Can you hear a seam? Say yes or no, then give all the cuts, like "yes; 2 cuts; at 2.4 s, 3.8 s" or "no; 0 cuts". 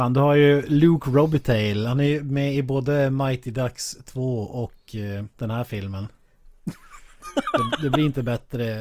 yes; 1 cut; at 5.3 s